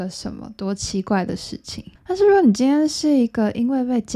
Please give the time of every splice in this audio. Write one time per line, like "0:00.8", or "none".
0:02.0